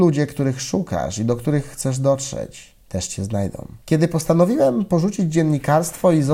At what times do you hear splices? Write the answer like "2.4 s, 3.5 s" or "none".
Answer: 2.8 s, 3.8 s